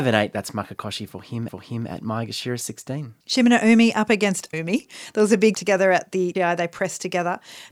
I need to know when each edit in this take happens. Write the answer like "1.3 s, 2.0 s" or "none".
1.5 s, 3.2 s, 4.5 s, 5.5 s, 6.3 s